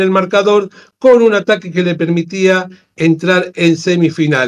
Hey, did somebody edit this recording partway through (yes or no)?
no